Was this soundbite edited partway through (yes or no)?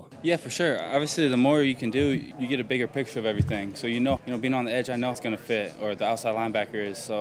yes